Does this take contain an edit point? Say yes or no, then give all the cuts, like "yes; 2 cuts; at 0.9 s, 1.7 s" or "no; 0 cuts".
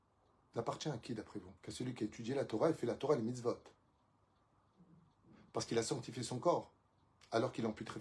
yes; 1 cut; at 1.6 s